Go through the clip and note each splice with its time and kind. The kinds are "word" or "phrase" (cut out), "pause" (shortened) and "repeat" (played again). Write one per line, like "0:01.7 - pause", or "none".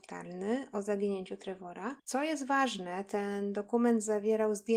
0:02.0 - pause